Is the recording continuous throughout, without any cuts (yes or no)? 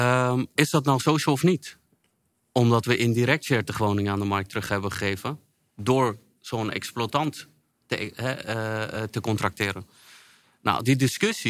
yes